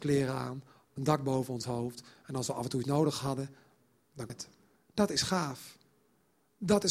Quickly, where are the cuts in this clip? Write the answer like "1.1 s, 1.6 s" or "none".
2.8 s, 4.3 s, 4.8 s